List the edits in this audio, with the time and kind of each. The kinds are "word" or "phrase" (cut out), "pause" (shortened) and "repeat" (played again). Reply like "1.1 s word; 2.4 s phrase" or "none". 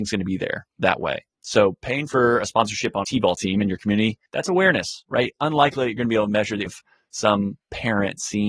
3.0 s word; 4.3 s pause; 6.7 s word